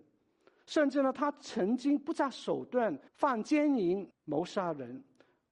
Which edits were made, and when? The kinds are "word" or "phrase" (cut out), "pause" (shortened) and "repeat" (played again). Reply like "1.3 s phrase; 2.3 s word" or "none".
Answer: 3.1 s pause; 4.1 s pause